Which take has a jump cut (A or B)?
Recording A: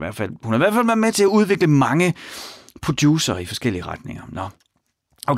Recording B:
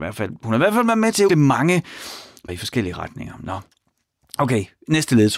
B